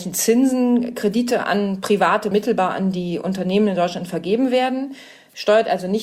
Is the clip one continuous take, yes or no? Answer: no